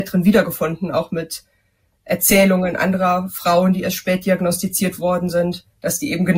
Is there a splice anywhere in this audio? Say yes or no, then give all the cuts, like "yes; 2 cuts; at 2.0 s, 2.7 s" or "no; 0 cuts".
no; 0 cuts